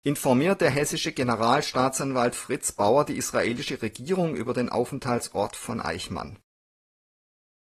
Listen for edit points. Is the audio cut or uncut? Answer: uncut